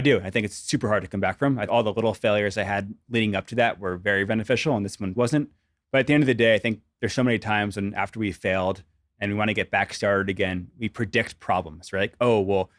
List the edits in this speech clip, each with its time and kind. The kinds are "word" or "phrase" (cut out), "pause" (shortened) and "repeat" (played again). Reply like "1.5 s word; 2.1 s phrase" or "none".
1.7 s word; 4.3 s word; 5.2 s word